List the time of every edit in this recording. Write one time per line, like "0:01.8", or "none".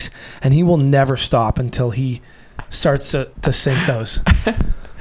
0:03.3